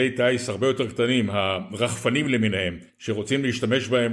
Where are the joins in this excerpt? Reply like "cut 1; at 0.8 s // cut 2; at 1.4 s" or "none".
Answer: none

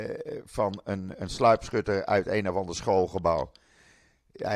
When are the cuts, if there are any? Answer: none

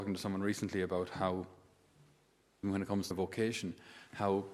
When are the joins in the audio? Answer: cut 1; at 2.6 s // cut 2; at 3.1 s

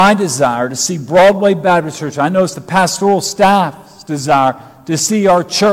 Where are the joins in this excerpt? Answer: none

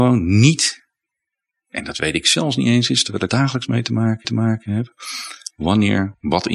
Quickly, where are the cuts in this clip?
cut 1; at 3.3 s // cut 2; at 4.2 s

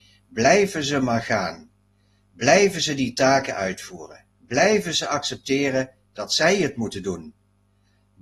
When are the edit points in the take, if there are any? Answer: cut 1; at 4.3 s

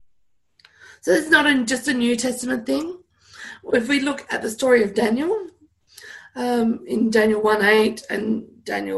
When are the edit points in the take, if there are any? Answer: none

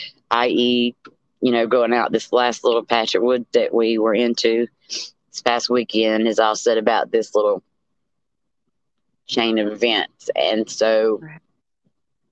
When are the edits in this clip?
none

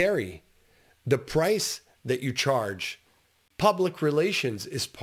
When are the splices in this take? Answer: none

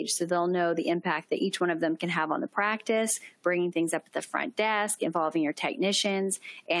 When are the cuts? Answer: none

